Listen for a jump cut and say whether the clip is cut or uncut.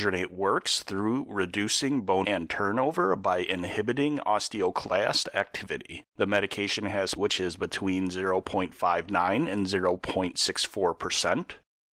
cut